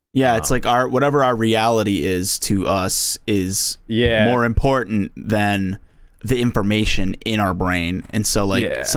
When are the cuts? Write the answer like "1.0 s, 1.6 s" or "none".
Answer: 6.1 s